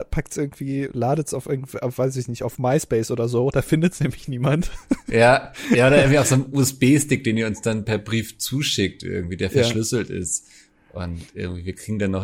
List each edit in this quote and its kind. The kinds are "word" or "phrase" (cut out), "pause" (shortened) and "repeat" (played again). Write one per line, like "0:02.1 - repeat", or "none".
none